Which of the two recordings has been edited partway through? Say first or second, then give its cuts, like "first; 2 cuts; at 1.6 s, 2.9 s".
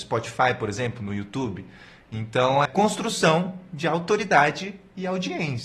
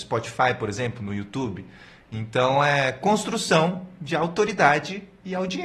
first; 1 cut; at 2.7 s